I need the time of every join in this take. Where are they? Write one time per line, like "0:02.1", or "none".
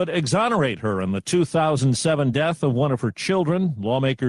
none

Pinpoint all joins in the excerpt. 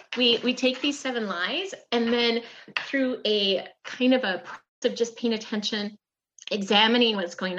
0:04.8

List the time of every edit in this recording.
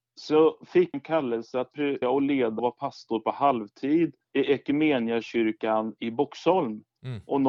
0:00.9
0:02.0
0:02.6
0:04.2

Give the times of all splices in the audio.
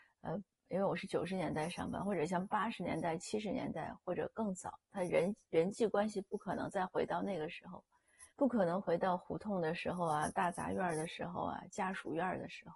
0:08.3

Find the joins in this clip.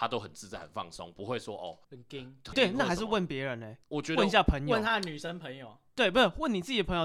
0:01.8
0:02.5
0:03.8

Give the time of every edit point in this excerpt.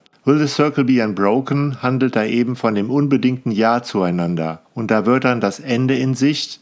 0:04.6

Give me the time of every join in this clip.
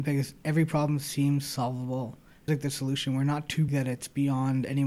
0:02.5
0:03.7

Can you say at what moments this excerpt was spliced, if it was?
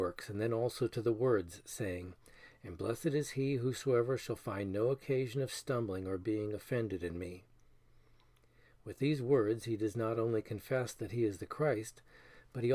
none

